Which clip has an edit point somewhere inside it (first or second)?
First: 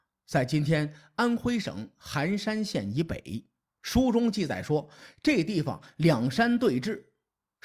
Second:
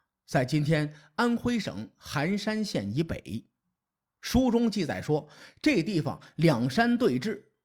first